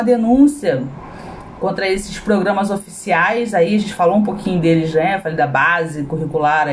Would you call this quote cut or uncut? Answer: uncut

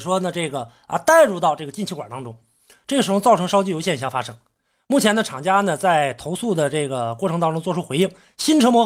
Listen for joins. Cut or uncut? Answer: uncut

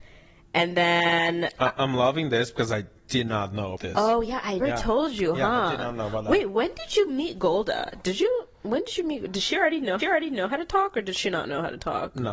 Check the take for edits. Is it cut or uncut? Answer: cut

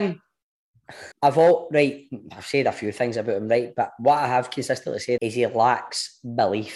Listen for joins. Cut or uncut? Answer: cut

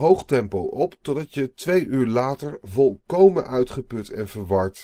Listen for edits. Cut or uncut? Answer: uncut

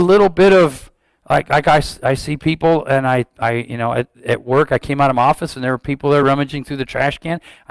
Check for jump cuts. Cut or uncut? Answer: uncut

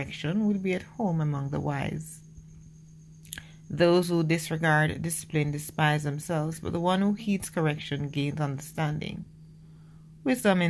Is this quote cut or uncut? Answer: uncut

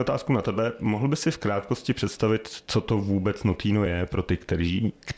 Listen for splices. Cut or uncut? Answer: uncut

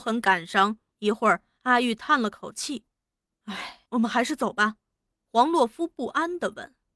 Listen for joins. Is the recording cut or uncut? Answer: cut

